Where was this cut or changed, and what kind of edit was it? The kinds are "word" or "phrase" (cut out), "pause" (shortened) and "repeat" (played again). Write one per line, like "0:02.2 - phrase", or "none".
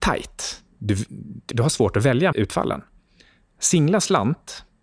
0:01.5 - word
0:02.3 - word